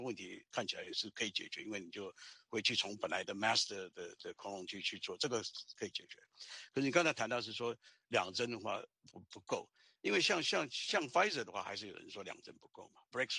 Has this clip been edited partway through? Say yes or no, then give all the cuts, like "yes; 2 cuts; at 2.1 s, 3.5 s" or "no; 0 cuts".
no; 0 cuts